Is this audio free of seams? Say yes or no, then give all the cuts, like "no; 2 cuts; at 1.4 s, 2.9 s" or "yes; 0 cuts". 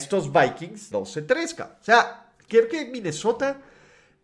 no; 2 cuts; at 0.9 s, 2.5 s